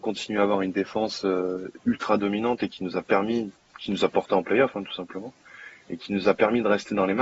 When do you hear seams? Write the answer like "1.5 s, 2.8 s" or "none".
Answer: none